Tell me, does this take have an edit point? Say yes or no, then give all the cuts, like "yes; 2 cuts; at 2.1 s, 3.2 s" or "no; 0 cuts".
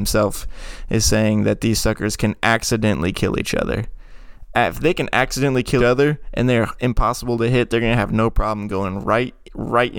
yes; 1 cut; at 5.8 s